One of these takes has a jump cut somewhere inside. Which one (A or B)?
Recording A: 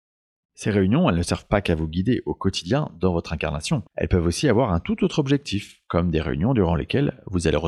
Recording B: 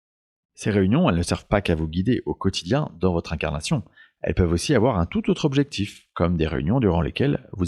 A